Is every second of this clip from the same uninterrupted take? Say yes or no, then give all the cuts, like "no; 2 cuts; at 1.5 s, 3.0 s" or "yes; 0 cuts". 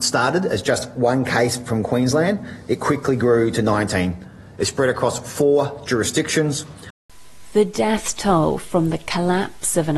yes; 0 cuts